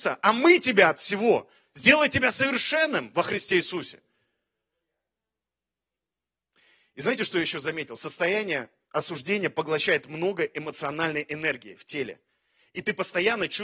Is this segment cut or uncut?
uncut